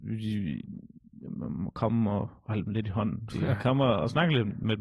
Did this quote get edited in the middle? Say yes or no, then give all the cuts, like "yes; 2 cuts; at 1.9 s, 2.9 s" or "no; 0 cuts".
yes; 2 cuts; at 2.4 s, 3.3 s